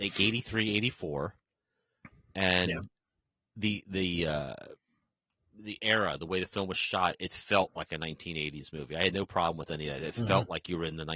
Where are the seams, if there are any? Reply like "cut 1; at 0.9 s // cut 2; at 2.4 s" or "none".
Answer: none

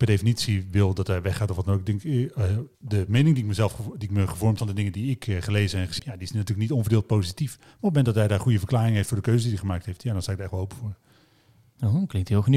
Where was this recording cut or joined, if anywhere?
cut 1; at 2.7 s // cut 2; at 4.6 s // cut 3; at 6.0 s

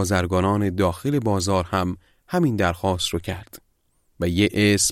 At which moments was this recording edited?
none

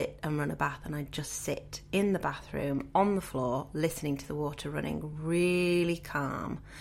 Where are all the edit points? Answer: none

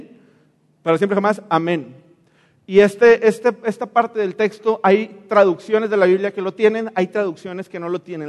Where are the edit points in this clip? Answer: none

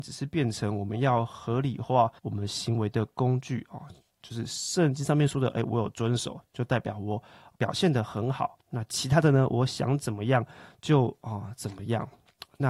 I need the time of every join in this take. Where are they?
cut 1; at 2.2 s // cut 2; at 7.5 s

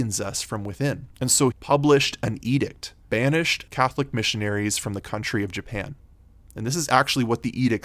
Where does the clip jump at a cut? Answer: cut 1; at 1.1 s // cut 2; at 1.5 s // cut 3; at 3.1 s // cut 4; at 3.7 s

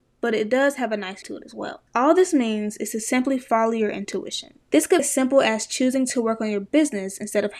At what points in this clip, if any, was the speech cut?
cut 1; at 1.2 s // cut 2; at 1.9 s // cut 3; at 4.6 s // cut 4; at 5.0 s

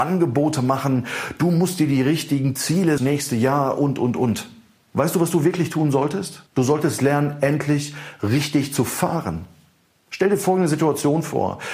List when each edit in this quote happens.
cut 1; at 3.0 s // cut 2; at 6.5 s

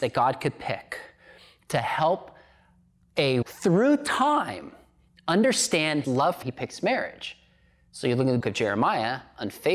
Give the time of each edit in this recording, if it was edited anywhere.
cut 1; at 3.4 s // cut 2; at 6.0 s // cut 3; at 6.4 s // cut 4; at 8.4 s

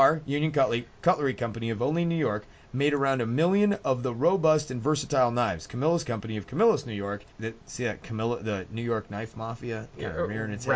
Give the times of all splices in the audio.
cut 1; at 6.0 s // cut 2; at 7.3 s

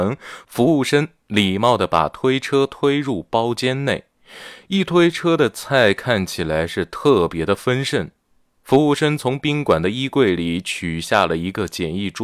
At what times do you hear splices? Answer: none

